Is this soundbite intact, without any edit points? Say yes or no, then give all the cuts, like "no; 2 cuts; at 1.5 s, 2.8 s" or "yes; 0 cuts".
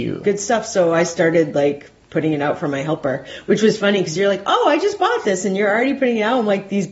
yes; 0 cuts